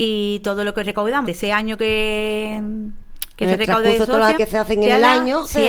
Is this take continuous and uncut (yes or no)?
no